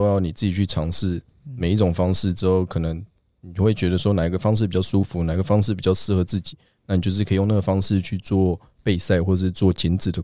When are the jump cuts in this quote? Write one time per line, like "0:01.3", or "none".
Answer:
none